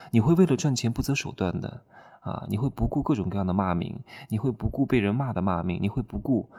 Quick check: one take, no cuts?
yes; 0 cuts

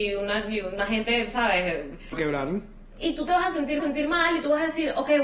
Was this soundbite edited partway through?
yes; 2 cuts; at 2.1 s, 3.8 s

